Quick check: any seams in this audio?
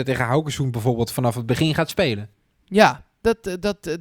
no; 0 cuts

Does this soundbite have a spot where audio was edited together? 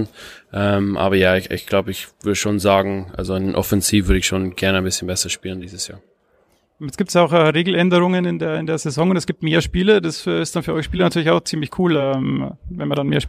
no; 0 cuts

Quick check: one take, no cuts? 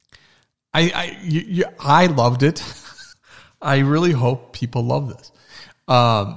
no; 1 cut; at 3.1 s

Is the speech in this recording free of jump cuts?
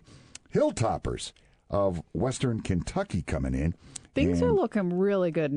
yes; 0 cuts

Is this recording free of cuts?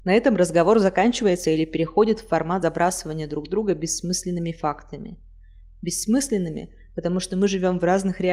yes; 0 cuts

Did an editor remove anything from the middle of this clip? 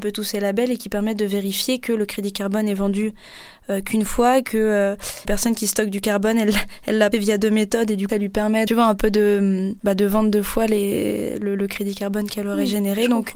yes; 5 cuts; at 5.2 s, 7.1 s, 8.1 s, 8.7 s, 9.8 s

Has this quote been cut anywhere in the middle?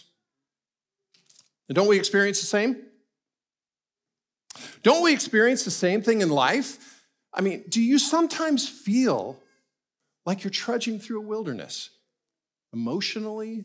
no; 0 cuts

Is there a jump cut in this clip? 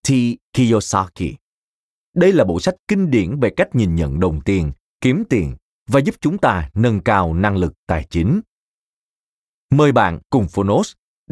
no; 0 cuts

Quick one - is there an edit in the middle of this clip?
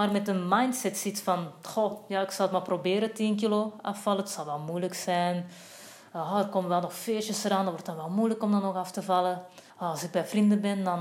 yes; 1 cut; at 9.7 s

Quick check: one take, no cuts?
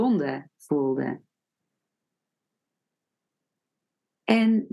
yes; 0 cuts

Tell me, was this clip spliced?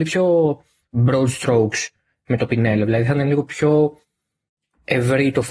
no; 0 cuts

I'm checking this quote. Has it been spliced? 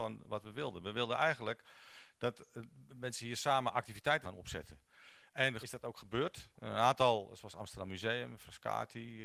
yes; 2 cuts; at 4.2 s, 5.6 s

